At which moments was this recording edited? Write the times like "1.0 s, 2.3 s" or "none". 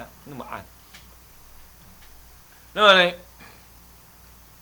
2.5 s